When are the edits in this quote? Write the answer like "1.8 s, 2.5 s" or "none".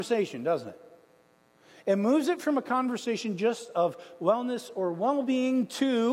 none